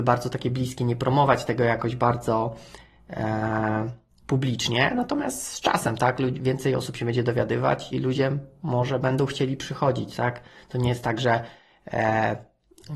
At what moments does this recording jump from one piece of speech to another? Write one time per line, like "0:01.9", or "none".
0:07.9